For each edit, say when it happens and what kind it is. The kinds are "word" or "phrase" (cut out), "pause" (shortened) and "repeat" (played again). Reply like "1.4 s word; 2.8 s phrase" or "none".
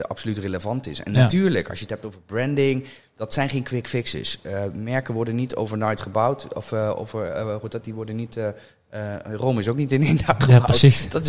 none